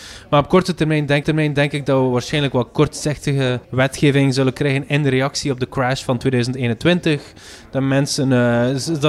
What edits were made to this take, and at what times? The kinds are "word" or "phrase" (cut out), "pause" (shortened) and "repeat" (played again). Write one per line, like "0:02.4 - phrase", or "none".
0:01.2 - repeat
0:03.6 - pause